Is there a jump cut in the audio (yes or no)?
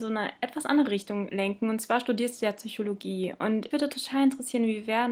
yes